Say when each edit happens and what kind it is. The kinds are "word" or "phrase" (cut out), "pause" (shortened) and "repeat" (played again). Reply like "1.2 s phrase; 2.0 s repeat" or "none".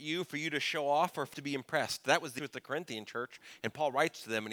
1.3 s word; 2.4 s word